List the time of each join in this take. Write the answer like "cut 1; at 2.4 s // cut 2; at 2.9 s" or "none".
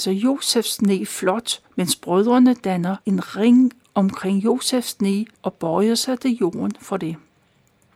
cut 1; at 1.7 s // cut 2; at 3.0 s // cut 3; at 5.3 s